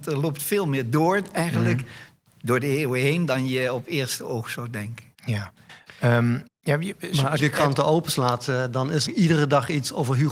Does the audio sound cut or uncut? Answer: cut